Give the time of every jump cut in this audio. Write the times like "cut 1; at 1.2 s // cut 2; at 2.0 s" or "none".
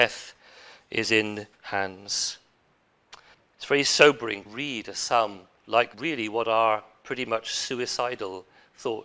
cut 1; at 1.5 s // cut 2; at 3.3 s // cut 3; at 4.4 s // cut 4; at 5.9 s